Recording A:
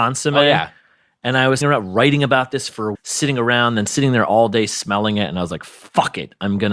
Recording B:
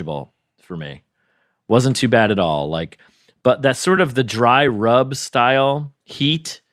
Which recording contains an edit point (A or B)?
A